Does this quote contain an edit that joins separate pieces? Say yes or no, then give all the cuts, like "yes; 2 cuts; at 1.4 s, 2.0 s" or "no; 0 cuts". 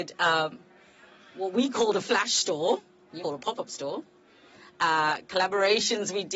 yes; 1 cut; at 3.2 s